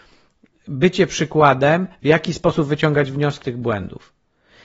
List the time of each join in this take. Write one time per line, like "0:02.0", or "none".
0:03.4